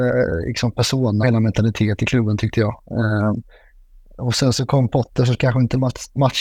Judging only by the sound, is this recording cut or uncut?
cut